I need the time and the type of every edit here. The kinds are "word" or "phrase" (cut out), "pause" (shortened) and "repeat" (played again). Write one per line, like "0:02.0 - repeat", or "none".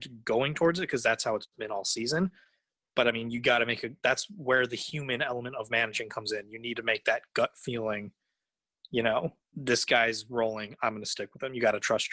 none